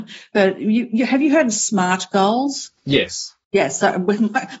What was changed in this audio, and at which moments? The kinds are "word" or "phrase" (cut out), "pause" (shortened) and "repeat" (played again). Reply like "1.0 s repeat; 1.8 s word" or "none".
3.4 s pause